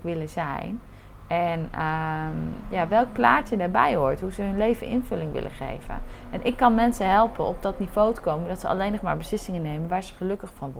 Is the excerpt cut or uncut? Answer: uncut